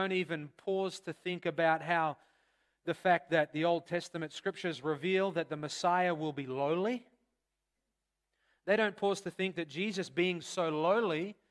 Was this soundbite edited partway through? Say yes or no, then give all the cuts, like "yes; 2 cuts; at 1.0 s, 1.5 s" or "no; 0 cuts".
no; 0 cuts